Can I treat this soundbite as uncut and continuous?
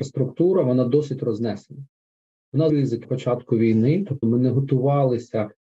no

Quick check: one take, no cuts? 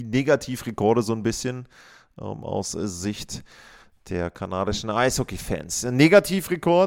yes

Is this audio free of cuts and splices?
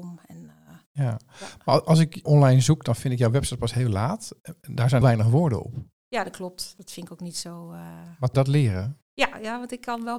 no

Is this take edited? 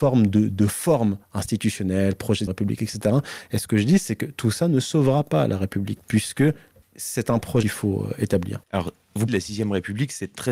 yes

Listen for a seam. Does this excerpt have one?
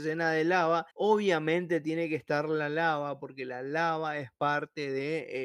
yes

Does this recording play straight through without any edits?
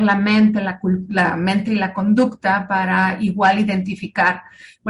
yes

